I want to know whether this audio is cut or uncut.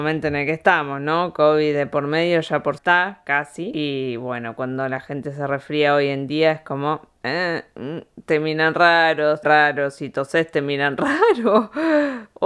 cut